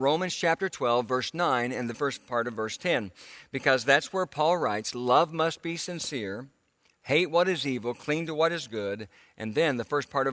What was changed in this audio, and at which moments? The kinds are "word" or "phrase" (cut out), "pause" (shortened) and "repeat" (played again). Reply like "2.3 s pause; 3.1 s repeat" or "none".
1.9 s word